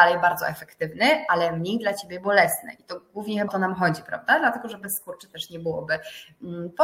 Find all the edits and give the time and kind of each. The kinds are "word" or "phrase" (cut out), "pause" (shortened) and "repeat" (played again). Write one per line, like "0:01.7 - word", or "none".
0:03.5 - word